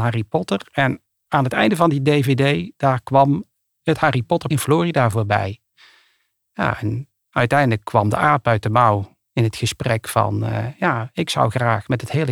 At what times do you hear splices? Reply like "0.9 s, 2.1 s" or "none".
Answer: 4.5 s, 9.3 s